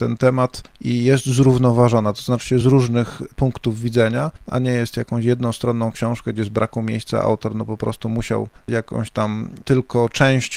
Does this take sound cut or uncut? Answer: uncut